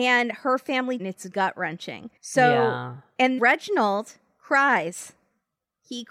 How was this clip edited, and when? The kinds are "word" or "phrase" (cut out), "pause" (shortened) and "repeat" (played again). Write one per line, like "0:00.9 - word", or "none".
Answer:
0:01.0 - phrase
0:01.3 - word
0:02.2 - pause
0:03.4 - word